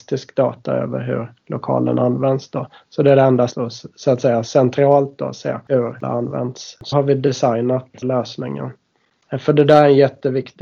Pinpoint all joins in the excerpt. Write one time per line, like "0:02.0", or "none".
0:03.5
0:06.0
0:06.9
0:08.0